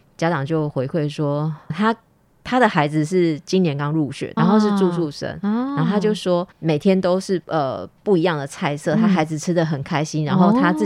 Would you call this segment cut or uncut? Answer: cut